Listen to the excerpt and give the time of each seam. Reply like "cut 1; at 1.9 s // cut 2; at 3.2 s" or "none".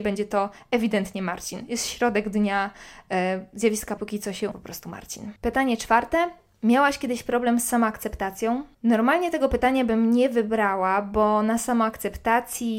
cut 1; at 4.0 s // cut 2; at 4.5 s // cut 3; at 5.4 s // cut 4; at 8.7 s